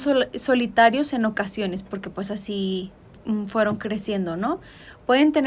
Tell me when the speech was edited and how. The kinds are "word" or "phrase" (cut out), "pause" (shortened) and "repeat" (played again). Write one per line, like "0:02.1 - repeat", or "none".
none